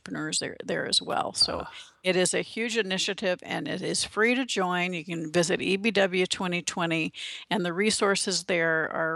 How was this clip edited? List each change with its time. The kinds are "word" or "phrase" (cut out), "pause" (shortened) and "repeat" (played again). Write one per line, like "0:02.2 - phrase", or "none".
none